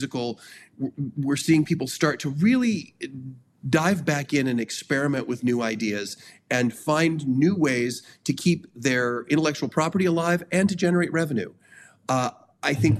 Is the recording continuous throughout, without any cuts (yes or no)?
yes